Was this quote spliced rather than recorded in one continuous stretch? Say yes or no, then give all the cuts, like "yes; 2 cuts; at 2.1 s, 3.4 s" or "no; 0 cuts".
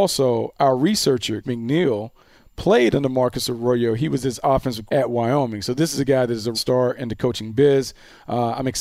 yes; 3 cuts; at 1.4 s, 4.9 s, 6.5 s